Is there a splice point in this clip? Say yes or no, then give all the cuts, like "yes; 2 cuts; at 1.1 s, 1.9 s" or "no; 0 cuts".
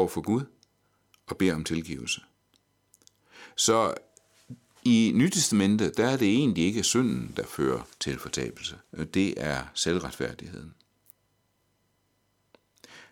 yes; 2 cuts; at 7.9 s, 8.9 s